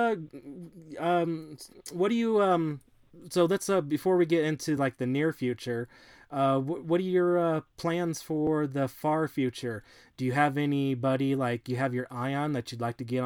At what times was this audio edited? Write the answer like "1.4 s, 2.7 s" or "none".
none